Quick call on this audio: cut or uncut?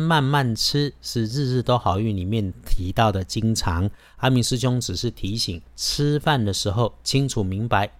cut